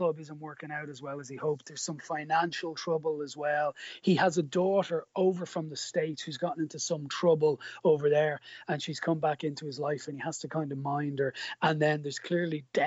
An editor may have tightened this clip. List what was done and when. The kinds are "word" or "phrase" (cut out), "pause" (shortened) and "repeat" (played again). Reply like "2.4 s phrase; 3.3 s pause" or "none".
none